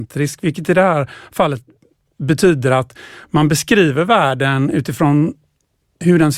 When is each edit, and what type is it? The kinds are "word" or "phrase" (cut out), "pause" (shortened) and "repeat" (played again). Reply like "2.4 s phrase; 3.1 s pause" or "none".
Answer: none